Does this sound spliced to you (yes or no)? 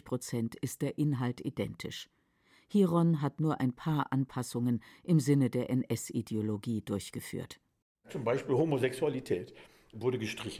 no